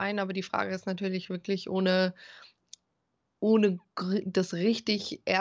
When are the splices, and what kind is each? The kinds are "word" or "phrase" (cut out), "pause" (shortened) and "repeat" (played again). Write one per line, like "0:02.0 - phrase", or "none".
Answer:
none